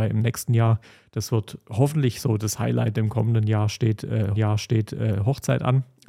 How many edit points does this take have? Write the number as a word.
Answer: one